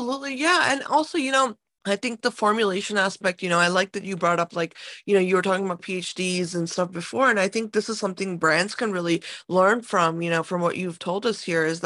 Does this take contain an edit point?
yes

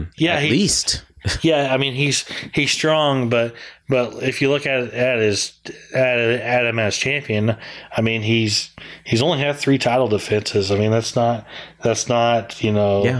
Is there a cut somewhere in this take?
no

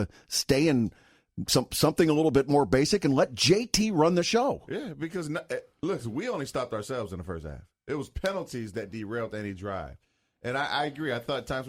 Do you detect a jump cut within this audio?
no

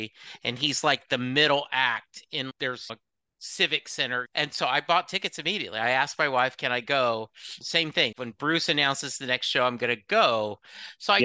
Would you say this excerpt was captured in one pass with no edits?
no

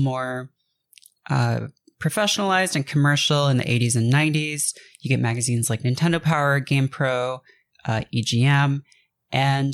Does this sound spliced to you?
no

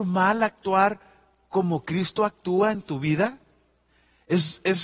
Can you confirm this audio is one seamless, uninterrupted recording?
yes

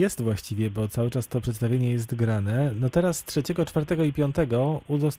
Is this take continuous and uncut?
yes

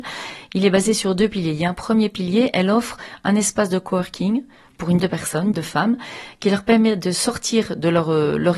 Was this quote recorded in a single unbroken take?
no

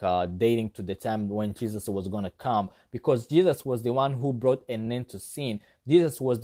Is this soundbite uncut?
yes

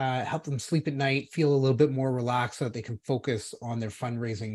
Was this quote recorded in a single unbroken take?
yes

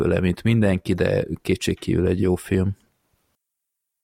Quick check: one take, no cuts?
yes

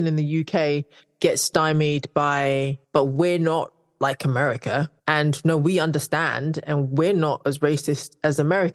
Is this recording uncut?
no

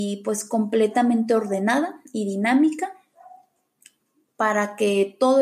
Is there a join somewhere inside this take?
no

